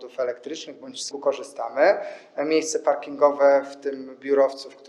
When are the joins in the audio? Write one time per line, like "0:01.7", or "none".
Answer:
0:01.1